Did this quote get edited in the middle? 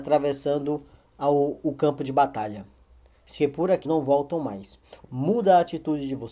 yes; 3 cuts; at 3.4 s, 3.8 s, 5.0 s

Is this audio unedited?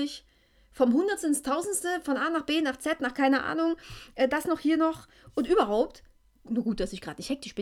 yes; 0 cuts

